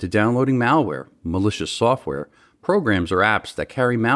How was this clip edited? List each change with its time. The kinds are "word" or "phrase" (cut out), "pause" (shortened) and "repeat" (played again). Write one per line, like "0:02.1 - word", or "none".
none